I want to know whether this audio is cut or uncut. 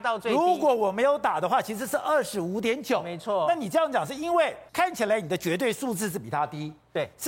cut